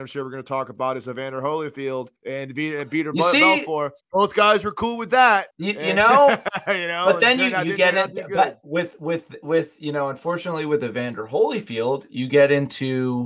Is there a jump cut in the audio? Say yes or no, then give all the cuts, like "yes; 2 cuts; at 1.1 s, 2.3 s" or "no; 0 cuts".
yes; 3 cuts; at 2.2 s, 4.0 s, 5.5 s